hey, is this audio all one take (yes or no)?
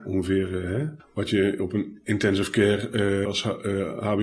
no